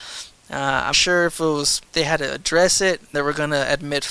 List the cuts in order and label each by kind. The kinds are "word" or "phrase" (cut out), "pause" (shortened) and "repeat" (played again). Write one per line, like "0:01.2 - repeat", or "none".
0:00.9 - word
0:01.9 - word
0:03.1 - word